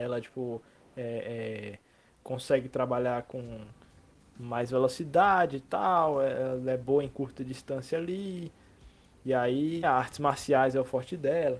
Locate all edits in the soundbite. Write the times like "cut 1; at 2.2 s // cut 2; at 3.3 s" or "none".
cut 1; at 9.8 s